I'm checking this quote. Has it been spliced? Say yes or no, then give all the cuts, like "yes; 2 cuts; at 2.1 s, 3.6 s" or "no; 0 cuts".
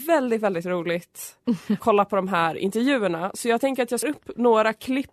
yes; 2 cuts; at 1.8 s, 4.0 s